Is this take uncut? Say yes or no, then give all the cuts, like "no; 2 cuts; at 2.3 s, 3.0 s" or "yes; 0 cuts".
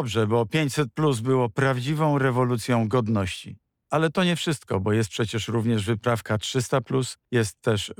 yes; 0 cuts